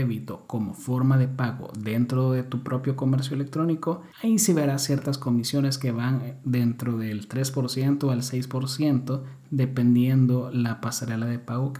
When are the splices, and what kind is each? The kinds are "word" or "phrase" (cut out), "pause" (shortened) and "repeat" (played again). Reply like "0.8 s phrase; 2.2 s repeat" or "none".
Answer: 4.1 s pause